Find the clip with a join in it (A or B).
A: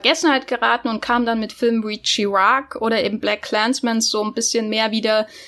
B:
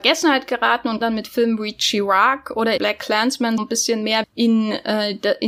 B